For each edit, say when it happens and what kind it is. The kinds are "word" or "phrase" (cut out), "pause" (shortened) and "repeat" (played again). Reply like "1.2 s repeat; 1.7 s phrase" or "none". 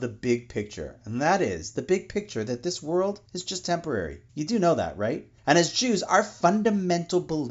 3.3 s pause; 4.3 s pause; 5.4 s pause